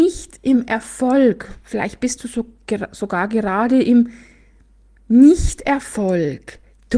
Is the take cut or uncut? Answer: uncut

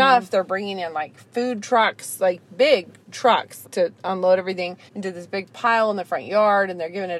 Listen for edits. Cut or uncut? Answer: cut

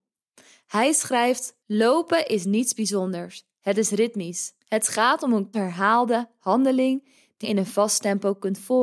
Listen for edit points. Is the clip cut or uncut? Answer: cut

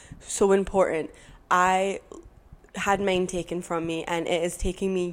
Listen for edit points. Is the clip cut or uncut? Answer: uncut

